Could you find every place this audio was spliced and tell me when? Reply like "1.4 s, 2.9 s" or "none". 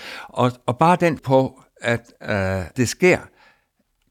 1.2 s, 2.7 s